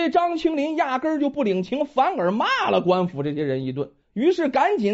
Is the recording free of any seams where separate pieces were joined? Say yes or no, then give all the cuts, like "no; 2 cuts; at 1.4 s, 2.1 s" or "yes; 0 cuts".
no; 1 cut; at 4.0 s